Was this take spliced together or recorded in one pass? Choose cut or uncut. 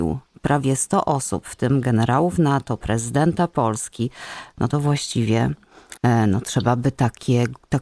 cut